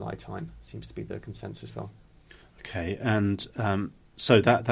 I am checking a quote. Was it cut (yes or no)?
yes